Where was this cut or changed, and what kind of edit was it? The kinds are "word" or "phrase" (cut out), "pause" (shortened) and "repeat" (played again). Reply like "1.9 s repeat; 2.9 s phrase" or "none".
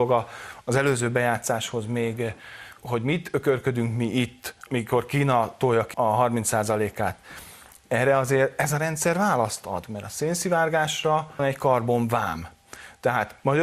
2.8 s word; 4.7 s word; 5.9 s word; 11.4 s word